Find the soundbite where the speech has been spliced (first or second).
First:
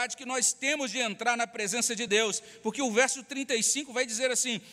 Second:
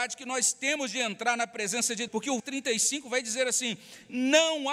second